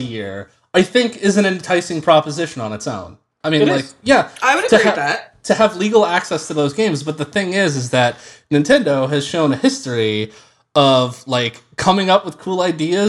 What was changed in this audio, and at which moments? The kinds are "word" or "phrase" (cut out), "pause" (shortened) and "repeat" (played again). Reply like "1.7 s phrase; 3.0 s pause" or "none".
none